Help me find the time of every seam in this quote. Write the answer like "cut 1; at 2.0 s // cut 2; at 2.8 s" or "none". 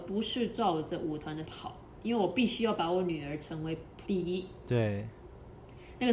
cut 1; at 1.4 s // cut 2; at 4.0 s